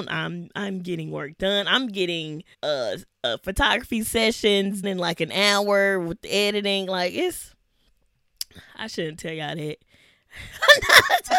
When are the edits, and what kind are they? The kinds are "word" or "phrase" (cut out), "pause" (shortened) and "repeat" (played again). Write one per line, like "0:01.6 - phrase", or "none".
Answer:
0:02.5 - pause
0:04.8 - word